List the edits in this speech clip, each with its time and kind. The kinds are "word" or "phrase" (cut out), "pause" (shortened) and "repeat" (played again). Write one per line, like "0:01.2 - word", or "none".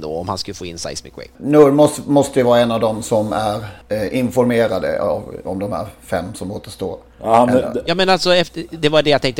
none